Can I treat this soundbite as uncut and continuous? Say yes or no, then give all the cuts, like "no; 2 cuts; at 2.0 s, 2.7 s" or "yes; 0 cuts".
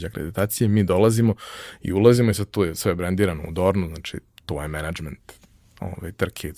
yes; 0 cuts